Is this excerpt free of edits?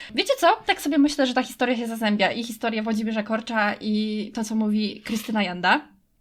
yes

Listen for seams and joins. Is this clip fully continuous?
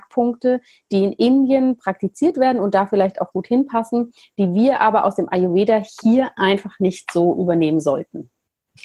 no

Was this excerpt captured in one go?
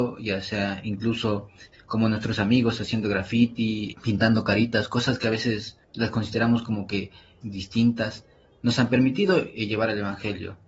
no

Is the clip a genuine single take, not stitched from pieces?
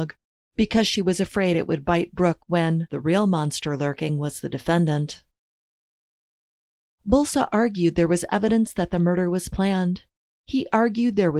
yes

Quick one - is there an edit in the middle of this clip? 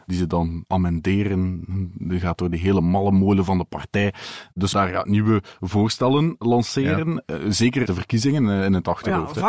yes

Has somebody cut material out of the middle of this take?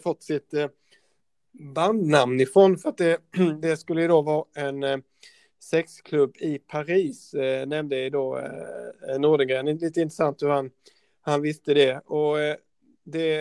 no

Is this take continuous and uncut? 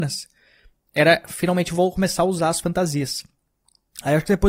yes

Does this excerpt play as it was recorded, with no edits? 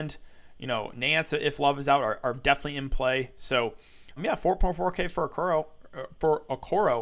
no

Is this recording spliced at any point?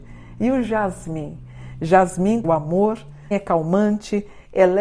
yes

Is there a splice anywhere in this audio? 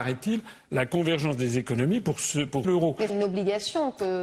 yes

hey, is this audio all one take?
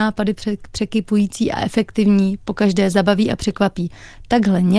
yes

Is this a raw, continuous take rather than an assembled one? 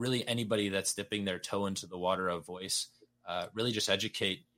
yes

